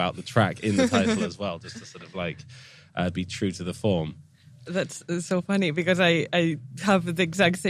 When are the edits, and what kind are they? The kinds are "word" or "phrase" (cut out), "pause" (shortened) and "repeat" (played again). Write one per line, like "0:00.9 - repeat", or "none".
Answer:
none